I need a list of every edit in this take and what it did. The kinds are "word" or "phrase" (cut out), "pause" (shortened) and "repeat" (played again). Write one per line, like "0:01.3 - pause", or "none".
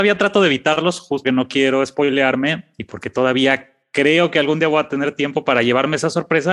0:01.2 - word